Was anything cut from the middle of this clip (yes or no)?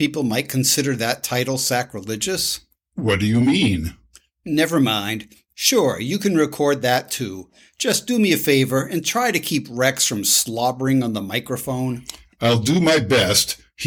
no